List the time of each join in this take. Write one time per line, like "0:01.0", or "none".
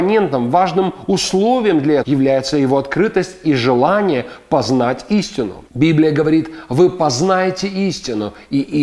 0:02.0
0:05.7